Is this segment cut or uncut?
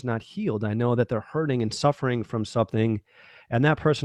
uncut